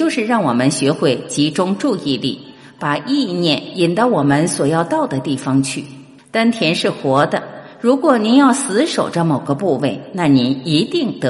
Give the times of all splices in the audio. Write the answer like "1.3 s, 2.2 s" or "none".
6.2 s